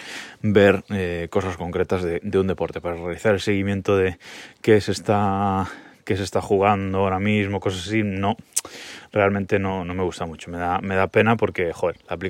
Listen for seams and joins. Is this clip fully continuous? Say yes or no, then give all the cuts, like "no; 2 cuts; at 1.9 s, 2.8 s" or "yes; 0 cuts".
yes; 0 cuts